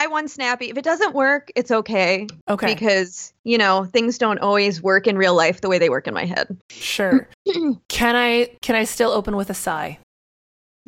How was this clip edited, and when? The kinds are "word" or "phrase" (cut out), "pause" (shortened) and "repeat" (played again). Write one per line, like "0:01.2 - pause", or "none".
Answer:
0:06.6 - pause